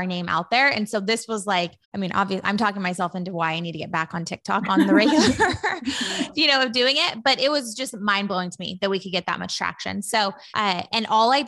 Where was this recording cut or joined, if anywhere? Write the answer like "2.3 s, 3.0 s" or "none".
1.8 s, 10.5 s